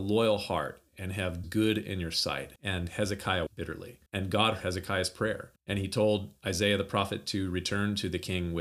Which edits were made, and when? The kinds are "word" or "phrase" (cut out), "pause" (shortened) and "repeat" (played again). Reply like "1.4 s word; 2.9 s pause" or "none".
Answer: 1.4 s phrase; 2.6 s pause; 3.5 s word; 4.1 s pause; 4.6 s phrase; 5.6 s pause